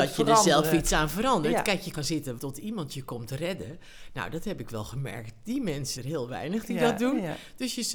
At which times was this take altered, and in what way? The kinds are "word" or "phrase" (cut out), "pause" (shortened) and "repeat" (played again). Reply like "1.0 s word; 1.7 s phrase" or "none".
1.9 s word; 2.4 s word; 6.0 s word